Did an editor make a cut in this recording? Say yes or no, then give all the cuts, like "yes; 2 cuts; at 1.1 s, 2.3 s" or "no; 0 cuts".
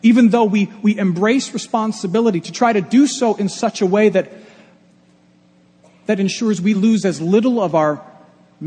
no; 0 cuts